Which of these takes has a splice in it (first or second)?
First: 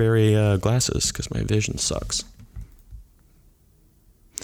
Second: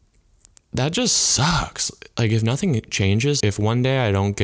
second